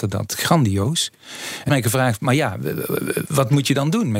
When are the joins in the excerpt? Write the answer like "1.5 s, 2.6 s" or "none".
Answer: 1.7 s